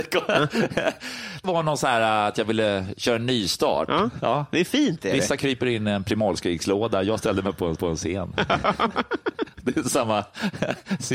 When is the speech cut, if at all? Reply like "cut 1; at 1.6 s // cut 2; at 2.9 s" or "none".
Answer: cut 1; at 1.4 s // cut 2; at 7.8 s